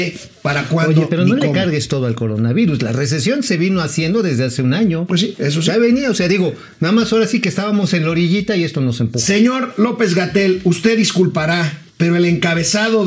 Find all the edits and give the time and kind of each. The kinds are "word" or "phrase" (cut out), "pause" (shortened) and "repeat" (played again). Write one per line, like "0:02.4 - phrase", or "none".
0:11.9 - pause